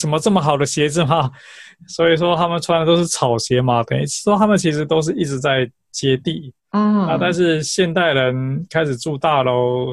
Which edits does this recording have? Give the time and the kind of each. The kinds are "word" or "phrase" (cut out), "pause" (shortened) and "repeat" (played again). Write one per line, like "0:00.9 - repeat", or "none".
0:06.6 - pause